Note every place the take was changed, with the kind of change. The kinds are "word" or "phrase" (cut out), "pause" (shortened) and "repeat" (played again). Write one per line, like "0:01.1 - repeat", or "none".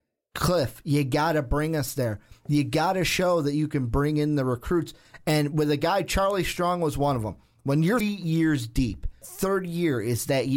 0:08.0 - word
0:09.2 - word